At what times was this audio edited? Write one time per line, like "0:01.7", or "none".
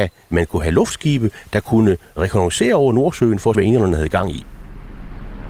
0:03.5